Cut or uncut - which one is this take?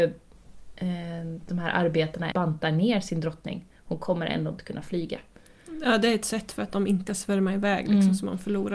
cut